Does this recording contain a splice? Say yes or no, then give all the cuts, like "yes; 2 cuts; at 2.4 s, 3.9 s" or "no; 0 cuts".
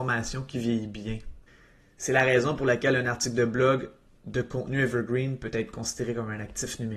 no; 0 cuts